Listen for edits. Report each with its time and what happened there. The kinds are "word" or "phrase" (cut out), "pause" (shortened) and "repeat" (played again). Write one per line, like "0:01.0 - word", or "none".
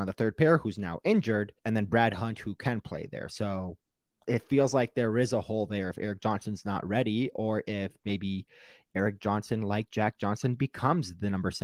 0:01.6 - pause